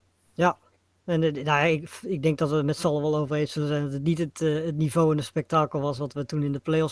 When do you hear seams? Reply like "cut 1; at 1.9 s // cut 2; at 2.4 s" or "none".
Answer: none